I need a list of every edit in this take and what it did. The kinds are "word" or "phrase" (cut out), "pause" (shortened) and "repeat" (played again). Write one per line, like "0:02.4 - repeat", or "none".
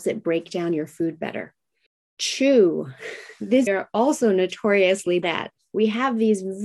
0:01.9 - pause
0:03.7 - phrase
0:05.2 - word